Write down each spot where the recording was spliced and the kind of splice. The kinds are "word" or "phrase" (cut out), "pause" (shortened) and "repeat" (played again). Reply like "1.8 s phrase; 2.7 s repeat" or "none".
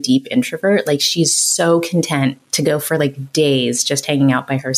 none